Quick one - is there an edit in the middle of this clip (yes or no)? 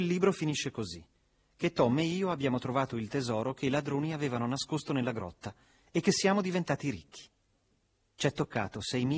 no